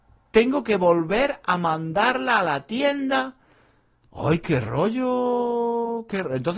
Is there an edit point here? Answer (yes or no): no